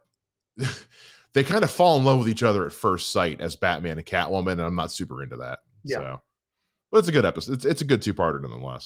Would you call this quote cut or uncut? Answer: uncut